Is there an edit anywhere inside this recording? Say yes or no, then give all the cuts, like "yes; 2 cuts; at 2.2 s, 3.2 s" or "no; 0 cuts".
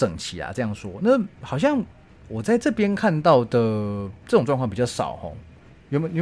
no; 0 cuts